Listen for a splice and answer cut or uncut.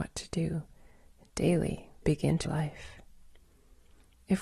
cut